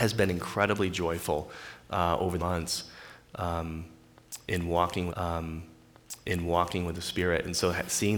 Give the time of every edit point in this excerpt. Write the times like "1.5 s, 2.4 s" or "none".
2.4 s, 5.1 s

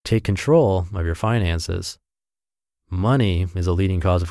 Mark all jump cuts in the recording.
none

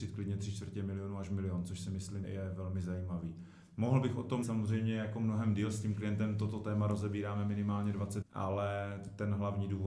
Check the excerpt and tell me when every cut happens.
2.2 s, 4.4 s, 8.2 s

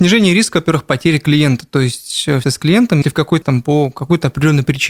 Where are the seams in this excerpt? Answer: 2.4 s, 3.0 s, 3.4 s

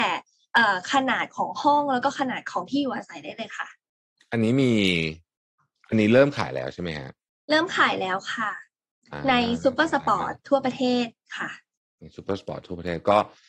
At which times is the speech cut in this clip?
none

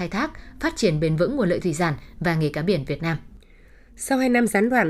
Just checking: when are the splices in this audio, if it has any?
none

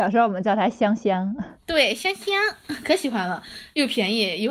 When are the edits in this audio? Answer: none

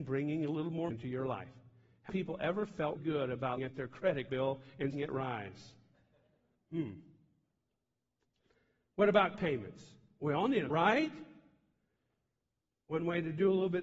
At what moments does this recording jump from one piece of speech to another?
0.9 s, 2.1 s, 3.0 s, 3.6 s, 4.3 s, 4.9 s, 9.3 s, 10.7 s

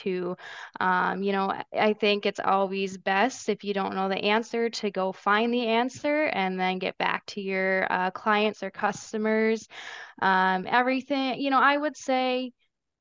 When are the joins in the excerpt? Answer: 1.7 s

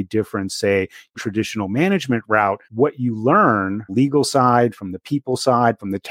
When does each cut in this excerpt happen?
1.1 s, 2.6 s, 3.9 s

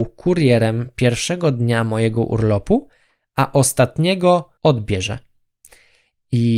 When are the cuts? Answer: 4.6 s

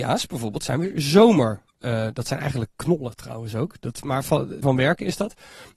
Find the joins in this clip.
1.7 s, 4.6 s

